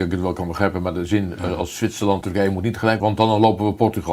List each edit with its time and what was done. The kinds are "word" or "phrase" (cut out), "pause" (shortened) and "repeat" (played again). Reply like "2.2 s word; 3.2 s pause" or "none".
2.2 s word; 3.0 s word